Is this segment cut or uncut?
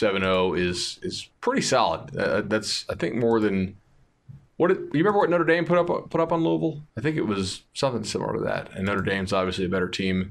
cut